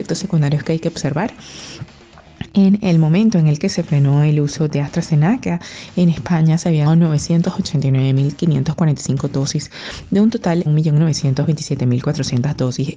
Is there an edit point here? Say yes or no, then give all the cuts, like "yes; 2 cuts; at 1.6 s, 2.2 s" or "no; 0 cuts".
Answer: yes; 2 cuts; at 6.9 s, 10.7 s